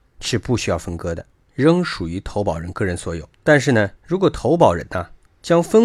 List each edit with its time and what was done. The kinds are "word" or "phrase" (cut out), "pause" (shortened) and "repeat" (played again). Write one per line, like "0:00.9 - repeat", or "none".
0:03.3 - pause
0:04.0 - pause

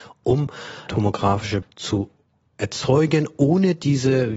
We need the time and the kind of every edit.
0:01.6 - word

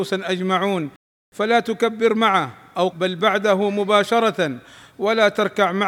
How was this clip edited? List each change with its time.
0:02.9 - word

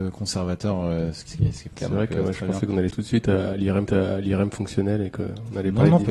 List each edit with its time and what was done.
0:01.3 - word
0:01.7 - word
0:02.9 - word
0:03.9 - repeat

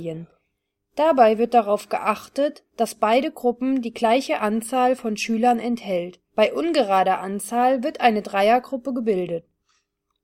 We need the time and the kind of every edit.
0:02.7 - pause
0:06.3 - pause

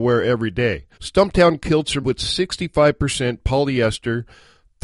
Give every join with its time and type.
0:00.9 - pause
0:02.0 - word

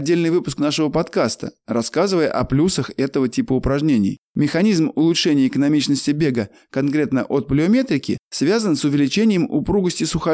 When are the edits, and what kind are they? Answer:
0:04.3 - pause
0:08.2 - pause

